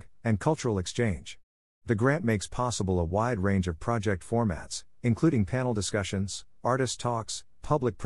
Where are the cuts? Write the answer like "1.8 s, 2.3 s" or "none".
none